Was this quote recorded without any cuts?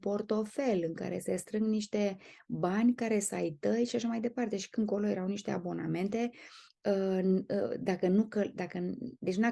yes; 0 cuts

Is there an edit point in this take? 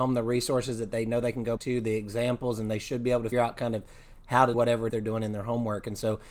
yes; 4 cuts; at 1.6 s, 3.3 s, 4.5 s, 4.9 s

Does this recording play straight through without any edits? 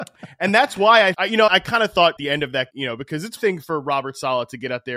no; 5 cuts; at 1.1 s, 1.5 s, 2.2 s, 2.7 s, 3.4 s

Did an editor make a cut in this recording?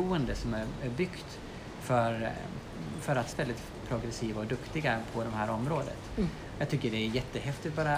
yes; 1 cut; at 3.3 s

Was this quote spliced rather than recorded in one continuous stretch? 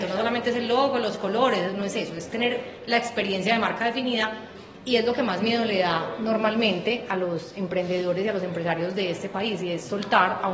no; 0 cuts

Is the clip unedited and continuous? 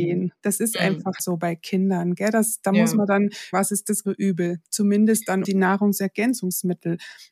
no; 4 cuts; at 1.2 s, 3.5 s, 4.0 s, 5.4 s

